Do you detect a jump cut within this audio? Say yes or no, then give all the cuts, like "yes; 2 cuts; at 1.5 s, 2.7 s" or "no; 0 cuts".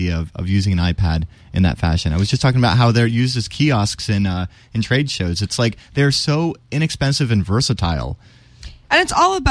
no; 0 cuts